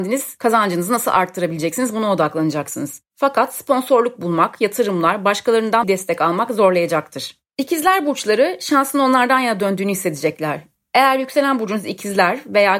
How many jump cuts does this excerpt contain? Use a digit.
1